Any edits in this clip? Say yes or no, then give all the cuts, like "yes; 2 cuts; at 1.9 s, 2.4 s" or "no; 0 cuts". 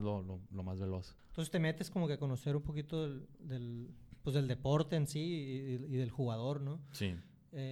yes; 2 cuts; at 1.2 s, 3.3 s